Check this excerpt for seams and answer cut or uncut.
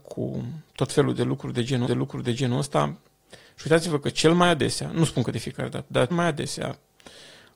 cut